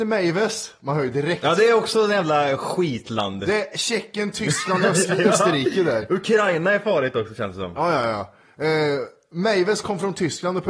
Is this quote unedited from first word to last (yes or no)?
yes